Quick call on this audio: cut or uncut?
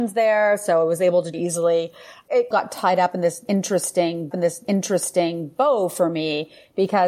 cut